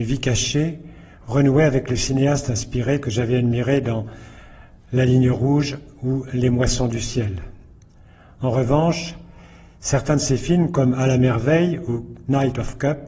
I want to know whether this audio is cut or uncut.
uncut